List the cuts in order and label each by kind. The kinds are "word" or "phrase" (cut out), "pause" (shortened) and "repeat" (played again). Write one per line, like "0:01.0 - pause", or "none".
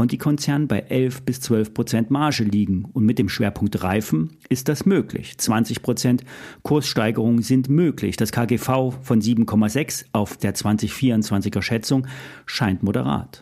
0:10.4 - word